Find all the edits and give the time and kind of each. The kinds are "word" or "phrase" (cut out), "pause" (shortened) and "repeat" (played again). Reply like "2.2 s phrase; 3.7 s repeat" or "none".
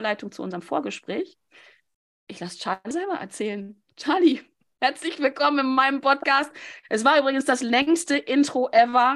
2.9 s word